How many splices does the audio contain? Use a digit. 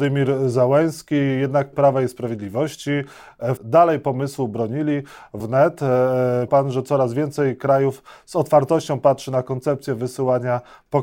4